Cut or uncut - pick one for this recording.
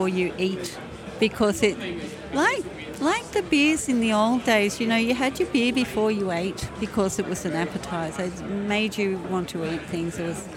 uncut